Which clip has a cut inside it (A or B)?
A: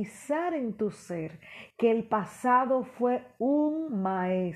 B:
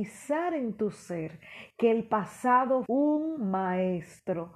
B